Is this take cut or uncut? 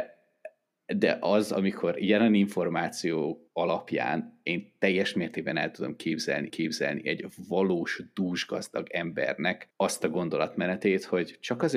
cut